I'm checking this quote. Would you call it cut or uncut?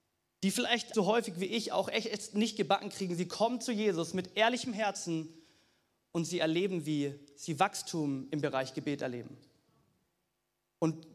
cut